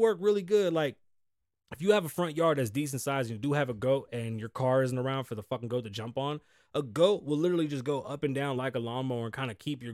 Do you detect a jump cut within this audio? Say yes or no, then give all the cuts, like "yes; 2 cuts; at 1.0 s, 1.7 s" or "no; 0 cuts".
no; 0 cuts